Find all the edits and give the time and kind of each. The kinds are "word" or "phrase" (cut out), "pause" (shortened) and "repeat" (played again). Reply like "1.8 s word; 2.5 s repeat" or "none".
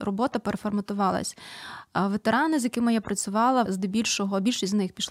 3.7 s word